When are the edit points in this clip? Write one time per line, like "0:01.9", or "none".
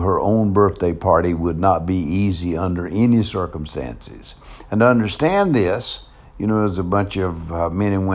none

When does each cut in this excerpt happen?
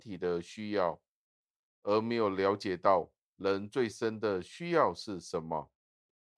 none

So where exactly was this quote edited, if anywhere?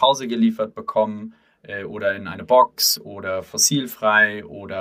none

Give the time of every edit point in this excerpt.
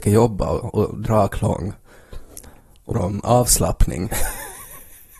0:01.1
0:02.9

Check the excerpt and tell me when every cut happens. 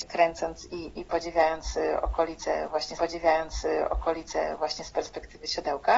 0:03.0

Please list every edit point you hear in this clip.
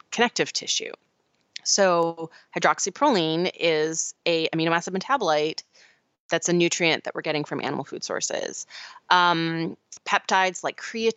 none

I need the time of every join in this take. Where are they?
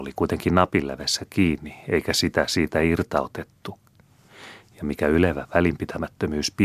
none

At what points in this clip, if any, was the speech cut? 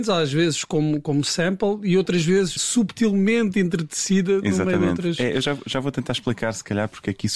0:02.6

